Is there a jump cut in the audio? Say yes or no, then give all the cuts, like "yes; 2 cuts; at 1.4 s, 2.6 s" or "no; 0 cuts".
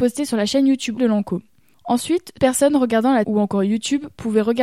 yes; 3 cuts; at 1.0 s, 2.4 s, 3.2 s